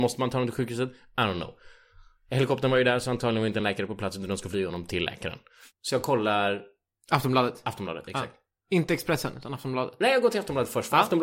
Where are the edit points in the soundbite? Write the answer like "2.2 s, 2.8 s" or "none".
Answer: none